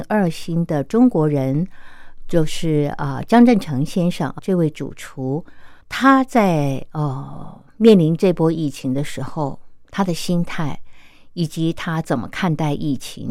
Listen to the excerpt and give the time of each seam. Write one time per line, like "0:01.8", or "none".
0:04.4
0:05.8